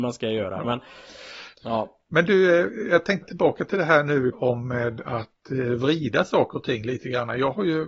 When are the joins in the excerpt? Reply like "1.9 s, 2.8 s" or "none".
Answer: 1.5 s, 3.2 s, 4.3 s